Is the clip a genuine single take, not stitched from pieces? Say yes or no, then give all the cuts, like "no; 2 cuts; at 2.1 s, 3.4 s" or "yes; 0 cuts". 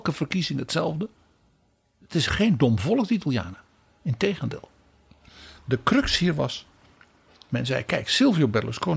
yes; 0 cuts